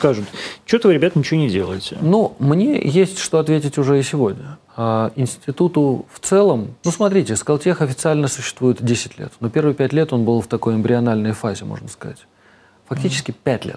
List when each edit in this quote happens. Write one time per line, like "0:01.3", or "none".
0:04.7
0:06.8